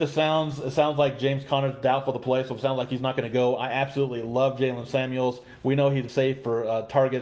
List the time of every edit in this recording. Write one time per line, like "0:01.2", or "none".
0:06.1